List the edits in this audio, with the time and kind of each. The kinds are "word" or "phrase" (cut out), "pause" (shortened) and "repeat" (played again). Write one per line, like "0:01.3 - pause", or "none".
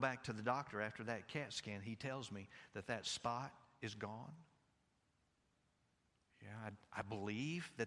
none